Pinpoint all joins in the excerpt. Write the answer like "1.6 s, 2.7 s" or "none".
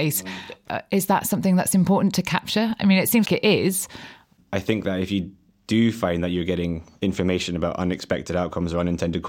3.3 s

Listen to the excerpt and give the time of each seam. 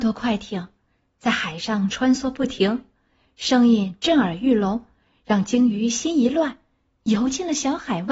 none

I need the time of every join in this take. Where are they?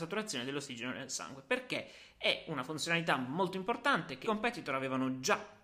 4.2 s

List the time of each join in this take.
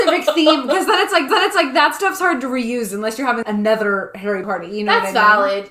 1.3 s, 3.4 s, 4.4 s

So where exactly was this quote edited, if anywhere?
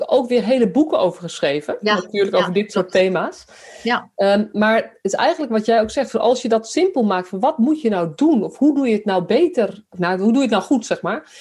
9.9 s

